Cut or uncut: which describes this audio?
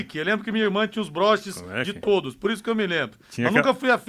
uncut